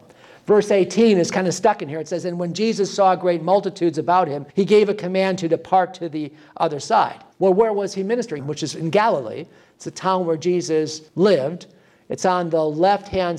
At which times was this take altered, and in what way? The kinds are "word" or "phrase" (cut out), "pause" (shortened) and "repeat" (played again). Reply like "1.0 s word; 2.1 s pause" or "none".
4.5 s pause; 7.3 s pause; 8.4 s phrase; 11.1 s pause